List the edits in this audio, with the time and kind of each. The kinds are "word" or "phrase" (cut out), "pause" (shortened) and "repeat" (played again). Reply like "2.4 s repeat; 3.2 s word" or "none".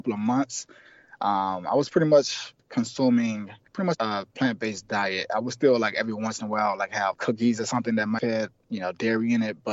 3.9 s word; 7.1 s word; 8.2 s word